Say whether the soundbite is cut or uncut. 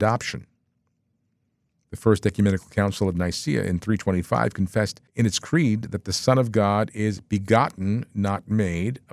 cut